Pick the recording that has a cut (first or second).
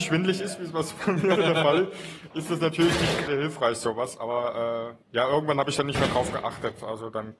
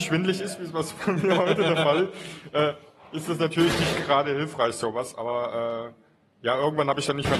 first